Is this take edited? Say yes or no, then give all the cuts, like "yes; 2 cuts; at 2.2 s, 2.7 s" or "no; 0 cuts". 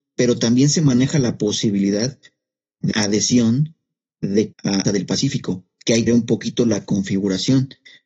yes; 4 cuts; at 2.9 s, 4.5 s, 4.8 s, 6.1 s